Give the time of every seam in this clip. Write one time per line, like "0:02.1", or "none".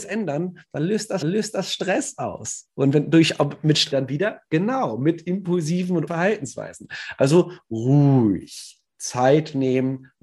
0:01.2
0:03.9
0:06.1